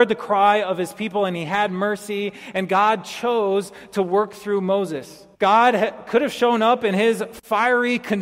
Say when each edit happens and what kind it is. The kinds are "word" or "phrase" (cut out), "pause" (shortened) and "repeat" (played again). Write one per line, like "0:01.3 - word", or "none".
0:05.3 - pause